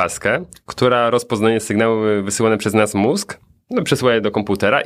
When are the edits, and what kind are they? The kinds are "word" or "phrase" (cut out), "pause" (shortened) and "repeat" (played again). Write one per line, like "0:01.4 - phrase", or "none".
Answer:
none